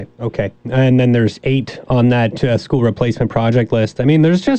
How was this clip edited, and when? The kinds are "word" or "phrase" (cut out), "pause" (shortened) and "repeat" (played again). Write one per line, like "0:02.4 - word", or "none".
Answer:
none